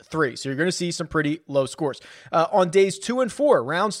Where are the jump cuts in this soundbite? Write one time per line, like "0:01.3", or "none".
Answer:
none